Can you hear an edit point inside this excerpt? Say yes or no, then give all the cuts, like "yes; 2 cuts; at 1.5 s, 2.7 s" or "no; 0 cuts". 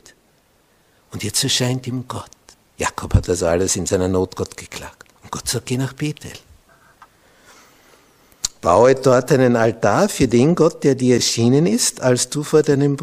yes; 2 cuts; at 2.5 s, 5.2 s